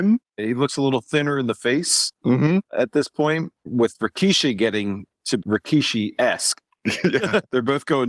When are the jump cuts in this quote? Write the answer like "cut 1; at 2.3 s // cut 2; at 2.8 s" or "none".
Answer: cut 1; at 2.7 s // cut 2; at 5.4 s